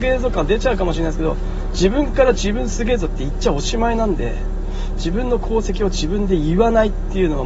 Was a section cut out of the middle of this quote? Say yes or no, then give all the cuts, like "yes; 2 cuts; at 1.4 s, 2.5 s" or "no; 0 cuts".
no; 0 cuts